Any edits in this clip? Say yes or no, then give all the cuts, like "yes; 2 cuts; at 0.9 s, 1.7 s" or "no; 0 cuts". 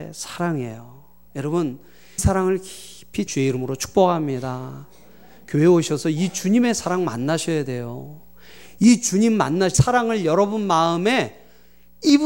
yes; 3 cuts; at 2.2 s, 3.3 s, 9.7 s